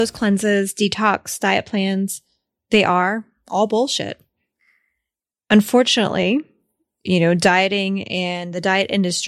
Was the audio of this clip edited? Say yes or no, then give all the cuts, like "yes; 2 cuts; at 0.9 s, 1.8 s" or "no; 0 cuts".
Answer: no; 0 cuts